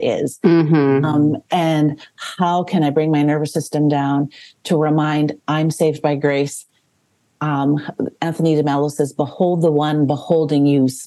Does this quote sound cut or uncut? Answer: uncut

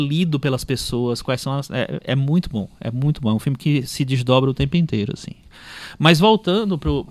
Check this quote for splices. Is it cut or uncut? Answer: uncut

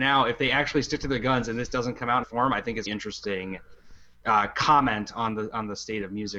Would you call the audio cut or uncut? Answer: cut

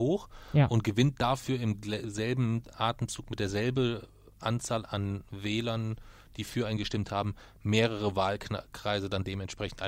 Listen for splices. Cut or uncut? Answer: uncut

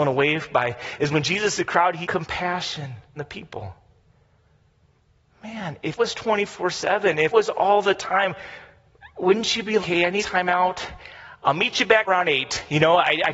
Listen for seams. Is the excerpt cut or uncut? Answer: cut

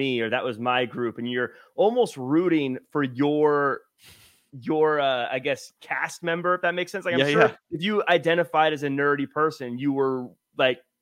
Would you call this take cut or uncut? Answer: cut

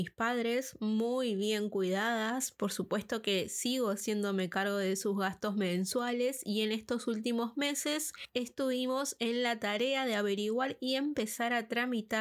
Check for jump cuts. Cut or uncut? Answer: uncut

